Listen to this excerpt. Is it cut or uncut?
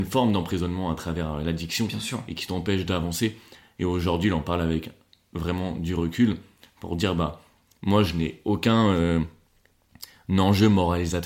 uncut